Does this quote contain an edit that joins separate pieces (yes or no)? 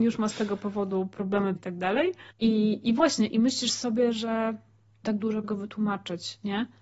yes